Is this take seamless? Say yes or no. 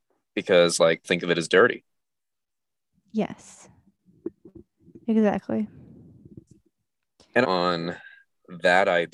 no